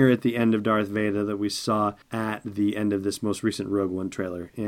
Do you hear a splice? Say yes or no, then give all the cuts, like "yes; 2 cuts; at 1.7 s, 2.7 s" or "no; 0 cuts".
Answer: yes; 1 cut; at 2.0 s